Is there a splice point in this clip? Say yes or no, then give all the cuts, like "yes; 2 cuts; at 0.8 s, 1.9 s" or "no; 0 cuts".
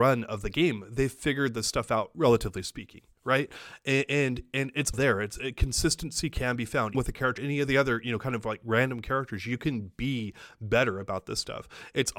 yes; 3 cuts; at 4.9 s, 6.9 s, 7.4 s